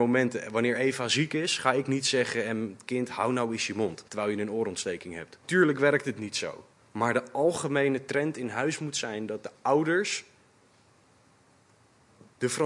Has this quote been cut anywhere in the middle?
yes; 3 cuts; at 4.1 s, 5.4 s, 6.7 s

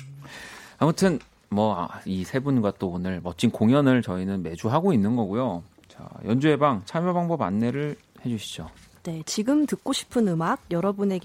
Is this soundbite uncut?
yes; 0 cuts

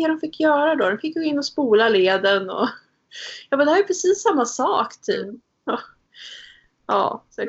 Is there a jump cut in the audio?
no; 0 cuts

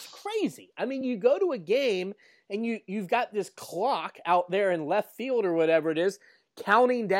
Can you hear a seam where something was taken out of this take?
no; 0 cuts

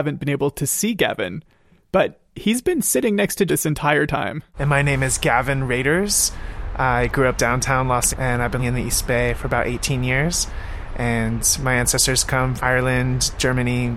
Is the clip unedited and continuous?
no; 5 cuts; at 3.5 s, 7.4 s, 8.1 s, 8.6 s, 12.6 s

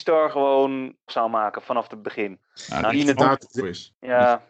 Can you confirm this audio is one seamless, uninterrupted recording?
no; 4 cuts; at 1.1 s, 2.4 s, 2.9 s, 3.6 s

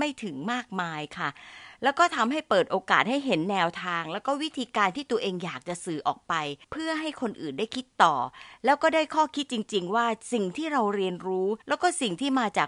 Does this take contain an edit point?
yes; 2 cuts; at 6.6 s, 11.6 s

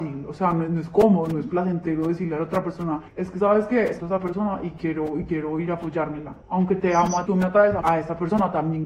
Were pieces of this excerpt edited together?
yes; 5 cuts; at 3.1 s, 4.0 s, 6.4 s, 7.3 s, 7.8 s

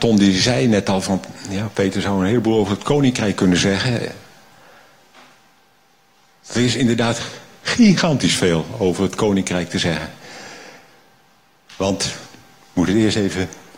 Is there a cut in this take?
no; 0 cuts

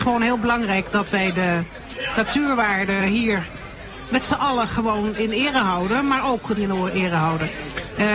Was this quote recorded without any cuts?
no; 2 cuts; at 3.0 s, 6.6 s

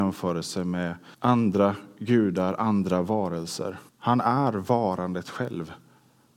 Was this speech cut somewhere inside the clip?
yes; 2 cuts; at 1.1 s, 3.9 s

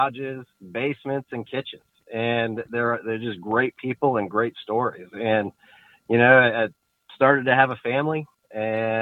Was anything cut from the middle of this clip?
no; 0 cuts

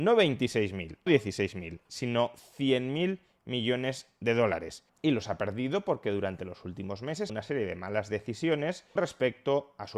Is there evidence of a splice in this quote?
yes; 3 cuts; at 1.1 s, 7.3 s, 9.0 s

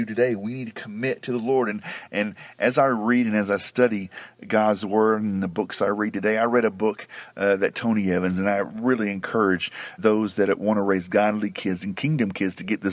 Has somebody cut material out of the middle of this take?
yes; 1 cut; at 10.0 s

